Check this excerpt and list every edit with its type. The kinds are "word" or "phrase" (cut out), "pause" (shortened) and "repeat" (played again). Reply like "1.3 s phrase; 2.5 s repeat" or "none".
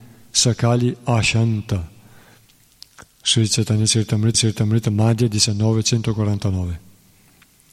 4.3 s repeat